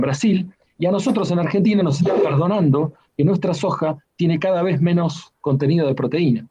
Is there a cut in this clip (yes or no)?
no